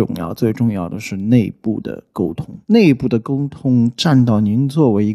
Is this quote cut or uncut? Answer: cut